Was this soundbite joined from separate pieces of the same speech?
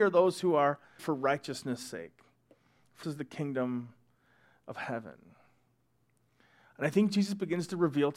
yes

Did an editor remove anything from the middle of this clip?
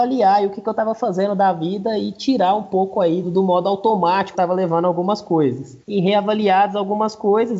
yes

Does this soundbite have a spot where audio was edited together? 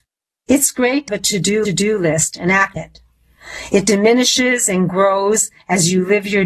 yes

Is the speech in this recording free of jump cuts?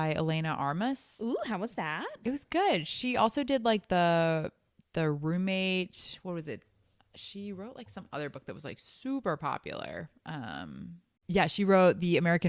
yes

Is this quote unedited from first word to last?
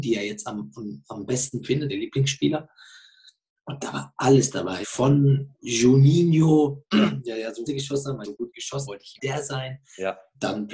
no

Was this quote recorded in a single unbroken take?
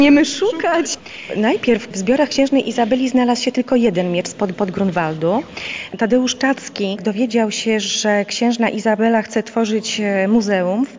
no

